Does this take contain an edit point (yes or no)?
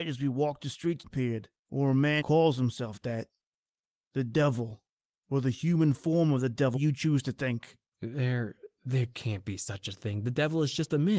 yes